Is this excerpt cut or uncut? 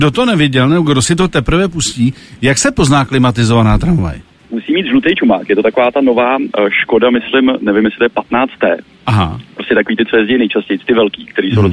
uncut